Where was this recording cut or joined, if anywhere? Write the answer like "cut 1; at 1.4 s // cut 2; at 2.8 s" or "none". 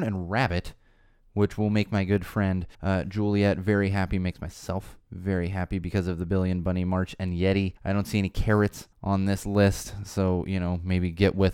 cut 1; at 2.7 s // cut 2; at 5.0 s // cut 3; at 7.8 s // cut 4; at 8.9 s